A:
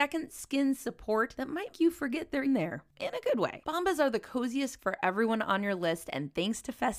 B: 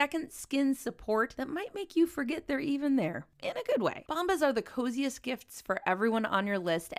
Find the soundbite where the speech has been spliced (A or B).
A